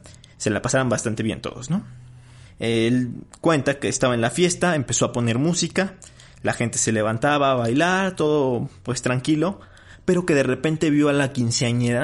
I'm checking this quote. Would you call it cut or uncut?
uncut